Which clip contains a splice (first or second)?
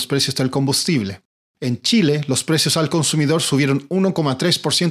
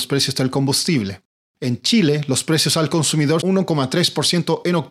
second